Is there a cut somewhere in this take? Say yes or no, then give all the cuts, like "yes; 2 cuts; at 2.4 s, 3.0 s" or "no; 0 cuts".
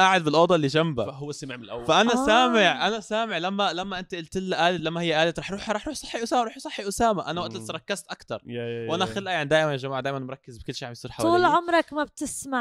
no; 0 cuts